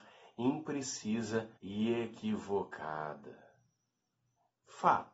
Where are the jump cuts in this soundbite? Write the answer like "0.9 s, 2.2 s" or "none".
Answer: 1.6 s